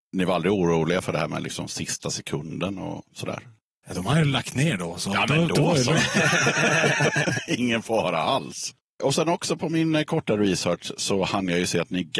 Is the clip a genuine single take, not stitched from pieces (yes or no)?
yes